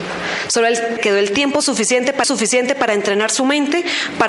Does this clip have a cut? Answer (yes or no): yes